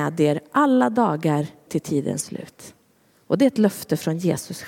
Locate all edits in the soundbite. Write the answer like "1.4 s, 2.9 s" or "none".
1.7 s